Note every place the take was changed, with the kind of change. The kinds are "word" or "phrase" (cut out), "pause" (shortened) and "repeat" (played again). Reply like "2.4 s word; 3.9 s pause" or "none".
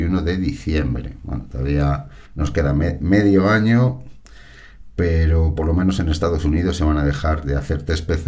2.3 s pause